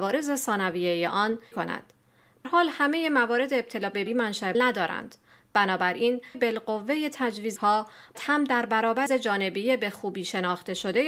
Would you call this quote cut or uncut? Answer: cut